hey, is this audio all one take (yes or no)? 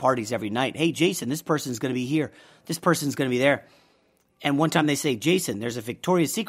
yes